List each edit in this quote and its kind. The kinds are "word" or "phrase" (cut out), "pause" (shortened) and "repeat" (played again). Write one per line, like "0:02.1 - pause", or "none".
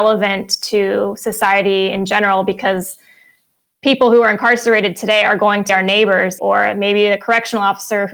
0:05.7 - word
0:06.4 - word